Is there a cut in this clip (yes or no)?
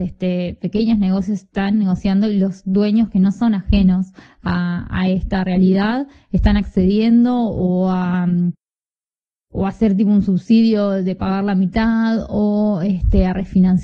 no